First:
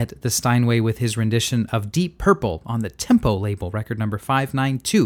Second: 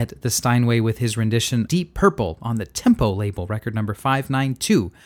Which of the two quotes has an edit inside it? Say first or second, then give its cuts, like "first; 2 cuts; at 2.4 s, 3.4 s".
second; 1 cut; at 1.7 s